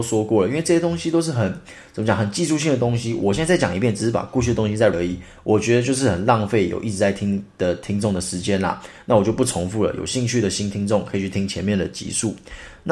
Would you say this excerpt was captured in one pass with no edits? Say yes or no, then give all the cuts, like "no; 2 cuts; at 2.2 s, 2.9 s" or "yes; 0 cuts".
no; 1 cut; at 4.9 s